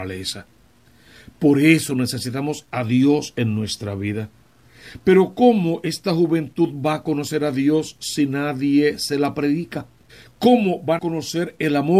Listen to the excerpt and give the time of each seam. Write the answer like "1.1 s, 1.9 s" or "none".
10.1 s, 11.0 s